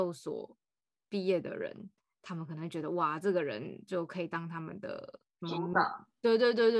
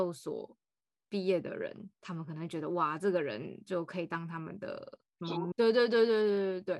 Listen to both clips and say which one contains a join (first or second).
second